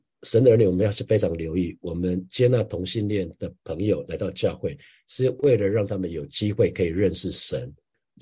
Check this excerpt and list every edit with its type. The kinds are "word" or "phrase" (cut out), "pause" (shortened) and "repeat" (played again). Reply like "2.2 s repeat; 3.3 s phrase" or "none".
none